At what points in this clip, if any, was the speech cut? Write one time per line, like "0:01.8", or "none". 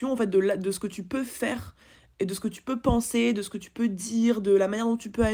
none